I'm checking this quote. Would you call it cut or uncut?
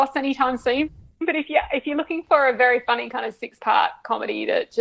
uncut